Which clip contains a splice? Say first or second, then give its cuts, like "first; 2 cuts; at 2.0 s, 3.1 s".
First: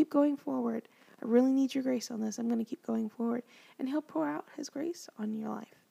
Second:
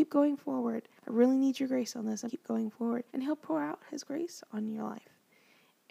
second; 3 cuts; at 1.0 s, 2.3 s, 3.1 s